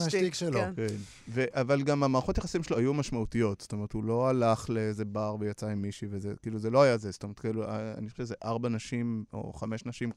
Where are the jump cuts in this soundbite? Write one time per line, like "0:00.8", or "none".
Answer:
0:02.7
0:08.2

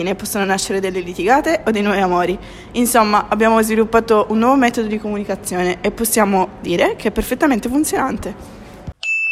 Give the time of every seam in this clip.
none

